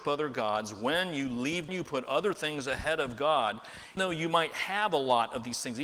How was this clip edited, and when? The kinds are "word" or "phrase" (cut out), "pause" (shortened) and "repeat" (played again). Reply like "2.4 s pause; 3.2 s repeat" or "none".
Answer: 1.7 s phrase; 4.0 s word